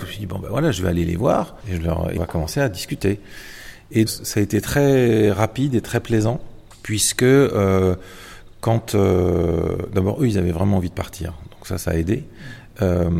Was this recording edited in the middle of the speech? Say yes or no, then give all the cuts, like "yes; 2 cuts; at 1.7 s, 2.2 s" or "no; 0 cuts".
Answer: yes; 3 cuts; at 1.6 s, 2.2 s, 4.1 s